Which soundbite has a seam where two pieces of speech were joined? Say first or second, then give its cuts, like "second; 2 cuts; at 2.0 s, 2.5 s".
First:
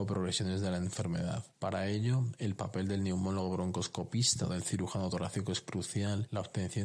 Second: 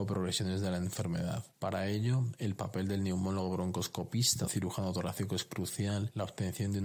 second; 1 cut; at 4.5 s